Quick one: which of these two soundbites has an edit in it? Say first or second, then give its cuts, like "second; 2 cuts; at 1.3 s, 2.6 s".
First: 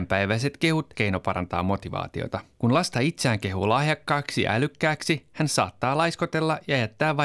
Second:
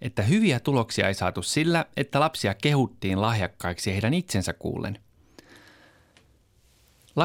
first; 2 cuts; at 0.9 s, 2.5 s